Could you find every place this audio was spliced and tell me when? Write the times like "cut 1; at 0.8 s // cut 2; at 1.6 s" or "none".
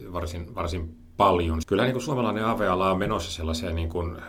cut 1; at 1.6 s